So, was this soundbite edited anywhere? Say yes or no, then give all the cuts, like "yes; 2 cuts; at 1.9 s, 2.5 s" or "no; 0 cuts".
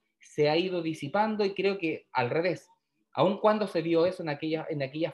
no; 0 cuts